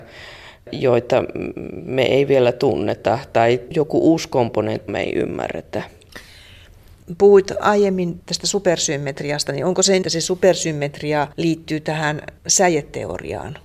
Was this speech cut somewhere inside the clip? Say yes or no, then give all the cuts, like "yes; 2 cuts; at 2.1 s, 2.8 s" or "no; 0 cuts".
yes; 5 cuts; at 3.7 s, 4.9 s, 10.0 s, 11.3 s, 12.4 s